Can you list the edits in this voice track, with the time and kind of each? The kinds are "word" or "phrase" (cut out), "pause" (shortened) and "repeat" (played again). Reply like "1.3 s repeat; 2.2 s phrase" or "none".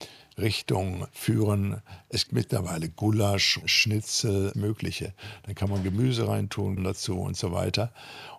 2.3 s word; 3.6 s word; 4.5 s phrase; 6.8 s word